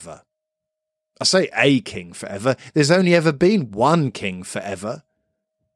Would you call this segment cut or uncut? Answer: uncut